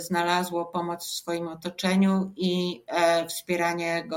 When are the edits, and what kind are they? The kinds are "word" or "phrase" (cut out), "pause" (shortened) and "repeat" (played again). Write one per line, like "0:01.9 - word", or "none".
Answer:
none